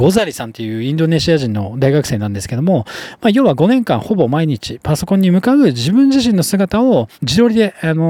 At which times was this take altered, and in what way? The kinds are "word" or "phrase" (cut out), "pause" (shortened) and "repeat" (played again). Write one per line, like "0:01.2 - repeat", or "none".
0:07.1 - pause